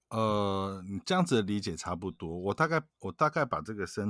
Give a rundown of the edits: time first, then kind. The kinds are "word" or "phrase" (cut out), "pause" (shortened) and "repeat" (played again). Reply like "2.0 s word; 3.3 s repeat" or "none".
2.9 s pause